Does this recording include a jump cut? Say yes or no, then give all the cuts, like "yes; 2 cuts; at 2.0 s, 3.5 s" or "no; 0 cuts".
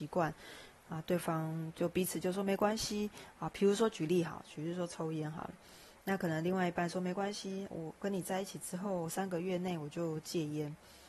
yes; 1 cut; at 7.7 s